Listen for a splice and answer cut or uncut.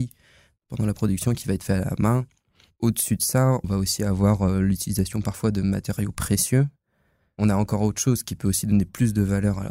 cut